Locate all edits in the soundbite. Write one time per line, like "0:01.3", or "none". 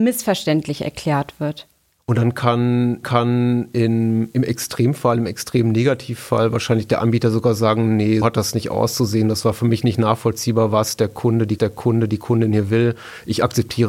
0:03.0
0:08.2
0:11.6